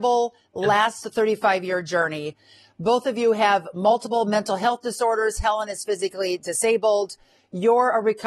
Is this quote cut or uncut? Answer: uncut